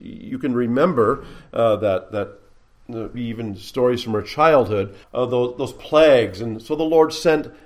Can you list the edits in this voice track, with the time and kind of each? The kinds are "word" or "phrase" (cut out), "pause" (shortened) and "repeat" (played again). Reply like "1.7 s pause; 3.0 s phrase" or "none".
3.1 s word; 5.0 s pause

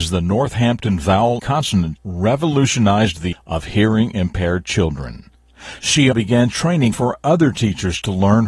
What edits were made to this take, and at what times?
1.4 s word; 2.0 s word; 3.3 s word; 6.1 s word; 6.9 s word

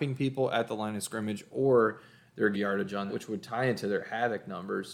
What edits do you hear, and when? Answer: 2.5 s phrase; 3.1 s word

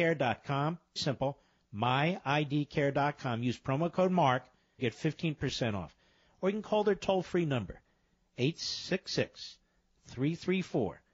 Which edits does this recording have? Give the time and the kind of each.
1.0 s word; 4.8 s word

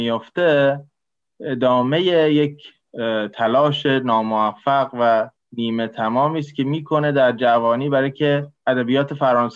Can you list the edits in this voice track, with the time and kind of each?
5.4 s pause; 8.6 s pause

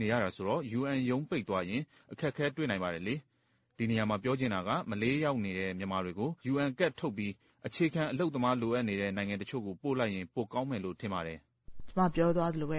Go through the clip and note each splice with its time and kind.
6.4 s pause

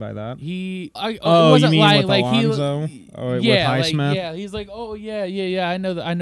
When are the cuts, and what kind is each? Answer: 1.0 s word

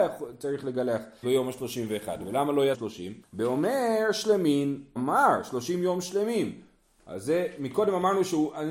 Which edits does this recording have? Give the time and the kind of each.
1.2 s word; 2.7 s phrase; 3.2 s pause; 5.0 s phrase

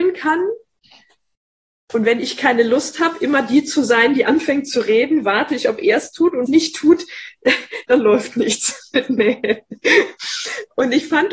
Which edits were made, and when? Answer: 6.5 s phrase

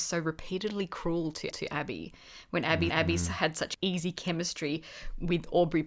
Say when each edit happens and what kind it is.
1.5 s repeat; 2.9 s repeat; 3.7 s word

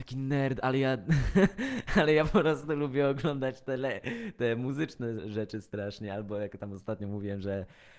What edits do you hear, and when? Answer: none

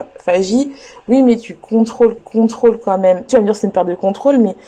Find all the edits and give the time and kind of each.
2.2 s repeat; 3.3 s phrase

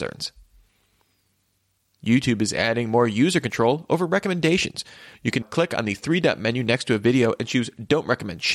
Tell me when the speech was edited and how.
5.4 s word

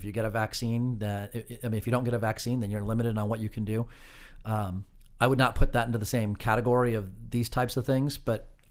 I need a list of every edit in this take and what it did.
none

